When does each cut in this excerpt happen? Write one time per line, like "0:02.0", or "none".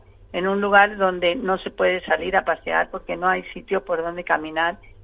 none